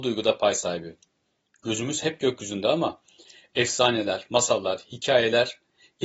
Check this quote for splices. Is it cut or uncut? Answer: uncut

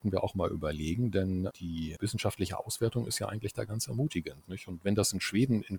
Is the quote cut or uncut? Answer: uncut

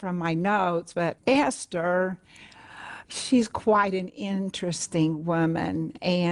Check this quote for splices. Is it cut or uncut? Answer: cut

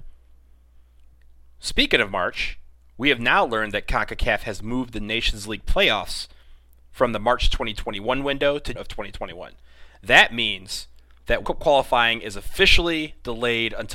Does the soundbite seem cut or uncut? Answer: cut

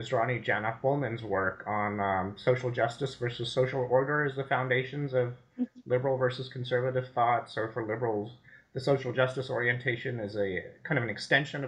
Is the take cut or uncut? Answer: uncut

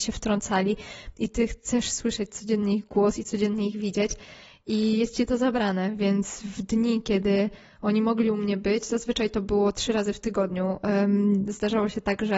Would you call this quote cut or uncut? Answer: uncut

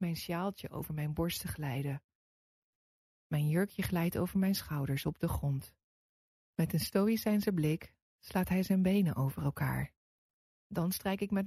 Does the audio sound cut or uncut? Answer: uncut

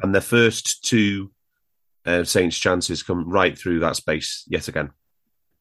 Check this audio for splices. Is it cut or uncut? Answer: uncut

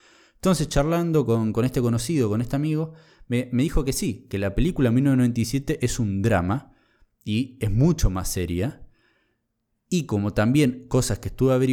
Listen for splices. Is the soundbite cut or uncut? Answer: uncut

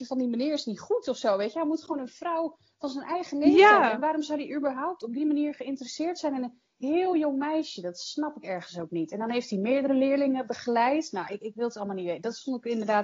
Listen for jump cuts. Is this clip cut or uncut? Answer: uncut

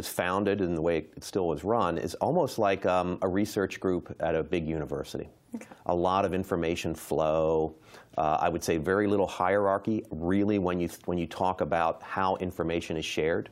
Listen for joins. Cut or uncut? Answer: uncut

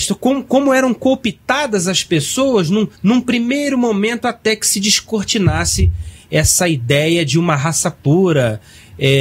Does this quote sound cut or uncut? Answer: cut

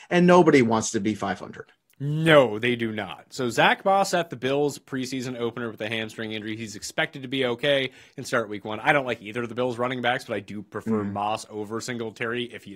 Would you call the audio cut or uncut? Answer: uncut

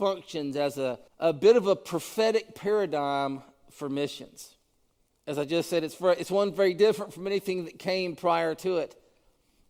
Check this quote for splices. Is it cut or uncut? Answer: cut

